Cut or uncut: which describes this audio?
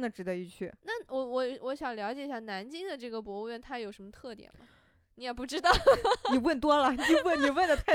uncut